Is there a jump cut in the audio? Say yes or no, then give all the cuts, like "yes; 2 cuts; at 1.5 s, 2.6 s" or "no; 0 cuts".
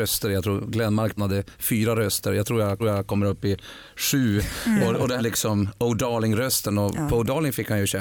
yes; 3 cuts; at 1.2 s, 2.8 s, 5.2 s